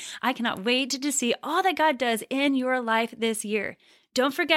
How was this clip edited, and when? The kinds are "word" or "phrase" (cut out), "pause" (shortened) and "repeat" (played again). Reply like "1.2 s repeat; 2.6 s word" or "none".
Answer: none